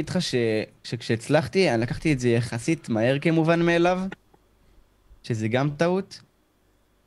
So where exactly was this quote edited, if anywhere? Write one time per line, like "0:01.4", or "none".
none